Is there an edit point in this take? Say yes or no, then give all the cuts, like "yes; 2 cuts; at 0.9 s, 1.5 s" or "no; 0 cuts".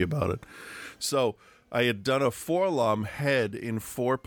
no; 0 cuts